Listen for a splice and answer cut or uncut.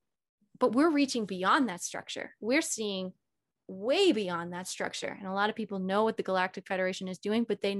uncut